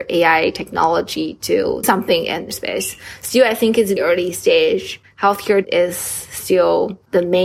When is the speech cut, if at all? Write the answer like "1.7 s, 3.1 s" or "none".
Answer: 1.8 s, 2.5 s, 4.0 s, 5.6 s